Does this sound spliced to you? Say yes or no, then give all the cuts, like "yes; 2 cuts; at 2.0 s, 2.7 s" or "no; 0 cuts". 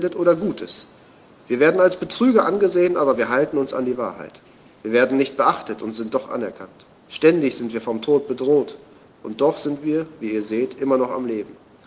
yes; 1 cut; at 7.0 s